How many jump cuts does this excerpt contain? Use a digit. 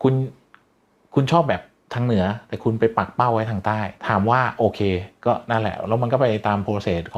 1